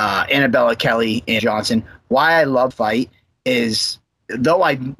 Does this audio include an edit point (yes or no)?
yes